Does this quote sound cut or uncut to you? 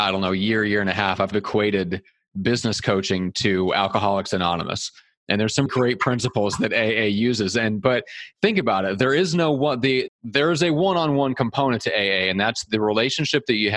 cut